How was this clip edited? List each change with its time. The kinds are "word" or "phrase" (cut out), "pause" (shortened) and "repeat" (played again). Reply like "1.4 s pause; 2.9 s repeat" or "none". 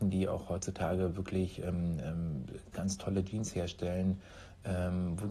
2.7 s word